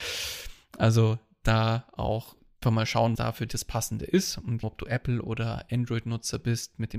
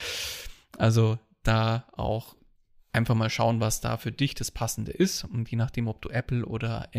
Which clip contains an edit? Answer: first; 4 cuts; at 2.6 s, 3.2 s, 3.5 s, 4.6 s

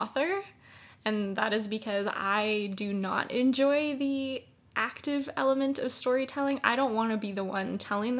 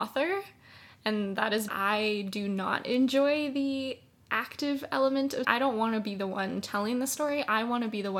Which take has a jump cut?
second; 2 cuts; at 1.7 s, 5.4 s

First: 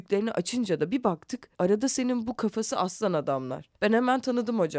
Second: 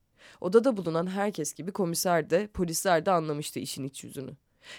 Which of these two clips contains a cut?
first; 2 cuts; at 1.5 s, 3.8 s

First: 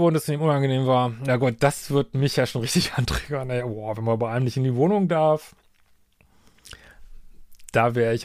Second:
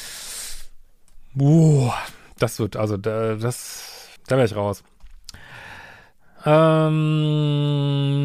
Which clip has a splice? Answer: second; 2 cuts; at 2.7 s, 4.2 s

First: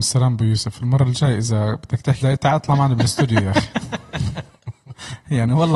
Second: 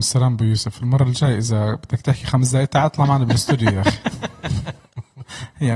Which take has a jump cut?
first; 1 cut; at 2.2 s

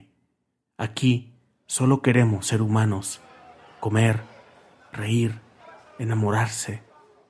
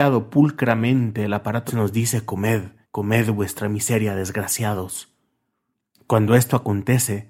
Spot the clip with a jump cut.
second; 2 cuts; at 1.7 s, 2.8 s

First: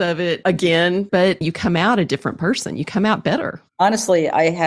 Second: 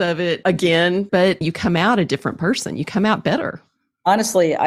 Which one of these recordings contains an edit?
first; 1 cut; at 3.7 s

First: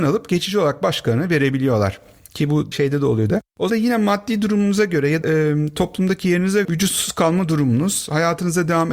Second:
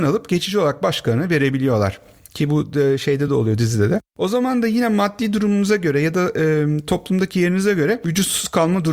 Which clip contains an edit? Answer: first; 5 cuts; at 2.7 s, 3.3 s, 3.7 s, 5.2 s, 6.6 s

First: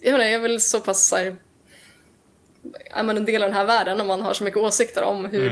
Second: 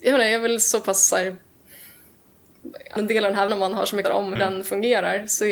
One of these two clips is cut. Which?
second; 4 cuts; at 3.0 s, 3.5 s, 4.0 s, 4.4 s

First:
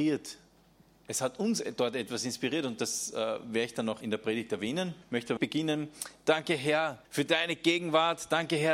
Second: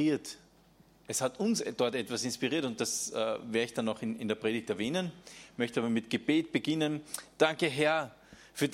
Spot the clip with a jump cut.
first; 4 cuts; at 4.0 s, 5.0 s, 5.4 s, 7.0 s

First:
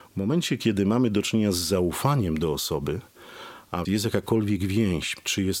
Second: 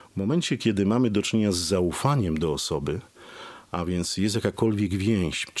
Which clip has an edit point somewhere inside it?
first; 1 cut; at 3.8 s

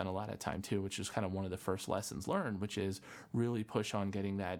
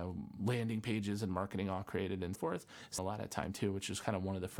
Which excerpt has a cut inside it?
second; 2 cuts; at 2.3 s, 3.0 s

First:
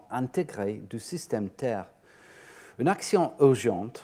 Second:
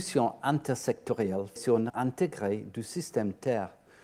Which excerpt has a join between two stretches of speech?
second; 2 cuts; at 1.6 s, 1.9 s

